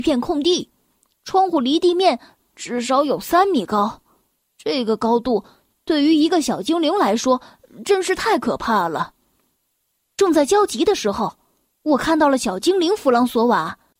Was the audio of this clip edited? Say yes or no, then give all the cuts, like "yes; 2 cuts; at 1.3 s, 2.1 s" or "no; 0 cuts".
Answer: no; 0 cuts